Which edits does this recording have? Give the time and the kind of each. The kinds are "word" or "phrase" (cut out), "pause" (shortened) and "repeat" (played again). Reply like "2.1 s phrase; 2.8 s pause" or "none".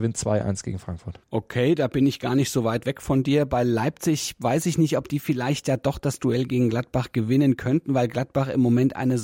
none